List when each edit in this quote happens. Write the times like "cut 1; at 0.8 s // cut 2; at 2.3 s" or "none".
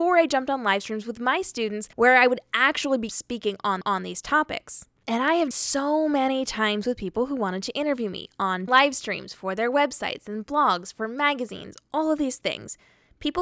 cut 1; at 1.9 s // cut 2; at 3.1 s // cut 3; at 3.8 s // cut 4; at 5.5 s // cut 5; at 8.7 s